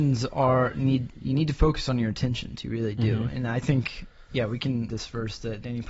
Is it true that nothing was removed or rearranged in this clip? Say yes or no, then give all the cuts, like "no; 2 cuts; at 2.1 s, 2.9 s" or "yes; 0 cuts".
no; 1 cut; at 4.9 s